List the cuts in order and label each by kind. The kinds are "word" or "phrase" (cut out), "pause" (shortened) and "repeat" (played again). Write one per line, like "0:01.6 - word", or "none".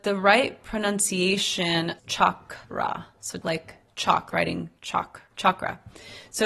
0:02.0 - phrase
0:02.6 - pause
0:03.4 - word
0:04.3 - word
0:05.3 - pause